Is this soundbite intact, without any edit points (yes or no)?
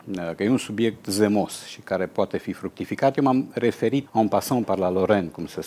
no